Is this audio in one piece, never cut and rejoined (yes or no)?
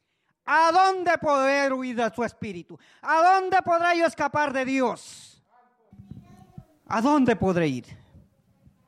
yes